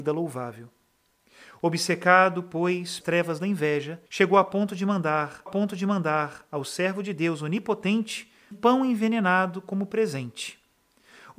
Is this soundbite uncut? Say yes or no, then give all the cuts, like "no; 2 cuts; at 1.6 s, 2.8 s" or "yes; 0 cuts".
no; 4 cuts; at 3.0 s, 4.1 s, 5.5 s, 8.5 s